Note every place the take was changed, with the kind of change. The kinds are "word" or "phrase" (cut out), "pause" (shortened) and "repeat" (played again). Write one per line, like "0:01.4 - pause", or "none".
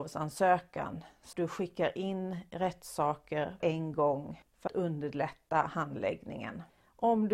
0:01.3 - word
0:03.6 - word
0:04.7 - word